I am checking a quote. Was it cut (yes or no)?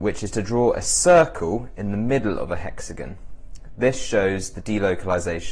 no